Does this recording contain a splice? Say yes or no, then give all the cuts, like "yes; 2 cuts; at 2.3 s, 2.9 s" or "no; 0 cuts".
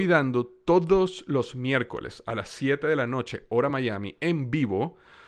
no; 0 cuts